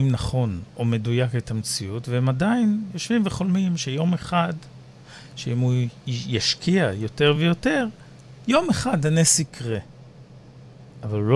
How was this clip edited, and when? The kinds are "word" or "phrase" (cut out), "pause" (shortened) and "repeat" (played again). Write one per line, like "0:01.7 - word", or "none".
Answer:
none